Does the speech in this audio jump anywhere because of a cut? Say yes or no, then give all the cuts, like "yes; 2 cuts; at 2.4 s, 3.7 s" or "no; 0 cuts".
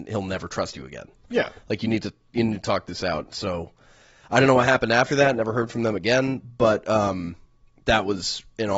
no; 0 cuts